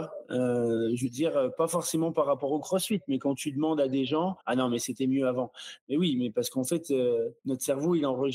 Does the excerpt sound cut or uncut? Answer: cut